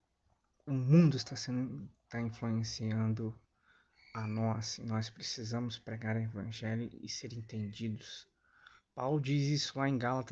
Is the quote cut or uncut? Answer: uncut